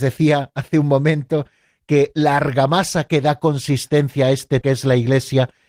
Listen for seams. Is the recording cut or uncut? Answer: cut